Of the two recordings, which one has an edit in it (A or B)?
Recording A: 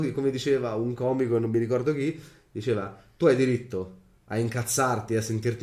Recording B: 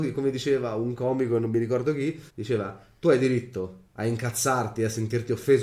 B